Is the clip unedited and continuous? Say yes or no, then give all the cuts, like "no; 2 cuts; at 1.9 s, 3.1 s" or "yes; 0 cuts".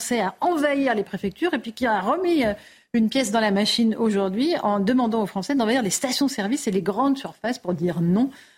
yes; 0 cuts